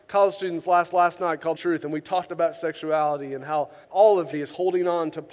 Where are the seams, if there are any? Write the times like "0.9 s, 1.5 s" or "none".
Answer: 0.9 s, 1.5 s, 3.8 s, 4.3 s